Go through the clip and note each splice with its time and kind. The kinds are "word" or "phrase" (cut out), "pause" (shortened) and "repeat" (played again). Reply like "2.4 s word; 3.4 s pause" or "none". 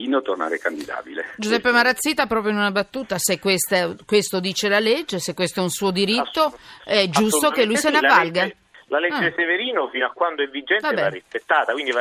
none